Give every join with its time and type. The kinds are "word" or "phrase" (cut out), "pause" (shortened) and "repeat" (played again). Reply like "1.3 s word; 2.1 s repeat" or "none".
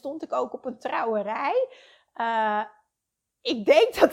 none